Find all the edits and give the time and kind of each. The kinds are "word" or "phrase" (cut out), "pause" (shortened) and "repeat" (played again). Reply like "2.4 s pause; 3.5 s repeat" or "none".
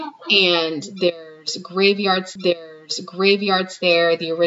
2.4 s repeat